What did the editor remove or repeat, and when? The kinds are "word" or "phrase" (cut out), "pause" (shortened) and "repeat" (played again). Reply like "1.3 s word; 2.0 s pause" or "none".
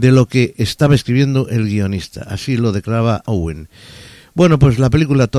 3.2 s word